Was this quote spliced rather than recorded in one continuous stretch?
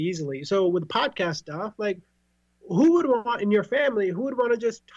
no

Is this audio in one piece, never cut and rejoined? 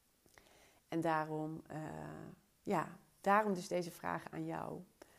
yes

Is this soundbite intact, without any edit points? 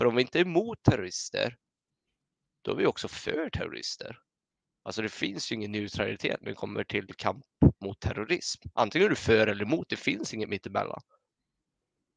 yes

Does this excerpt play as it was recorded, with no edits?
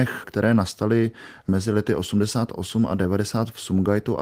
yes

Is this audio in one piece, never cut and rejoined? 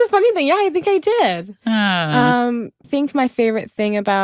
no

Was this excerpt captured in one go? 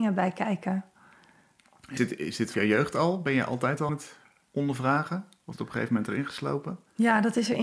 no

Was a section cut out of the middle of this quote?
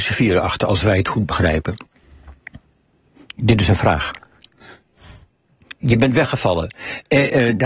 no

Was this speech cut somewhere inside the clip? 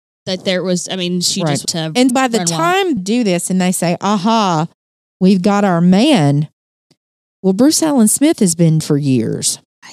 yes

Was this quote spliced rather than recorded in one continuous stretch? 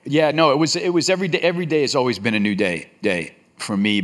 yes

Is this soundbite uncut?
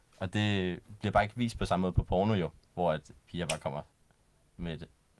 no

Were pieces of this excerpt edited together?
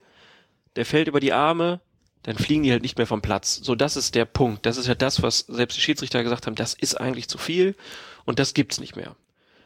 no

